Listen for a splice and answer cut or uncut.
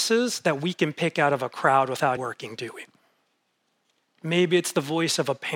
cut